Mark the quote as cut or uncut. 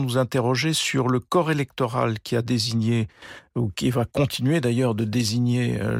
uncut